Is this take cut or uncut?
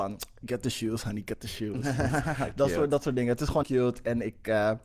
cut